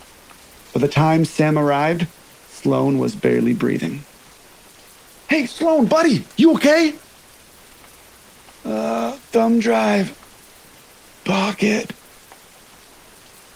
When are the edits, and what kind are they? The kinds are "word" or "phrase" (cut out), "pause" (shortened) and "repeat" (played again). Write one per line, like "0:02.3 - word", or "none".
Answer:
none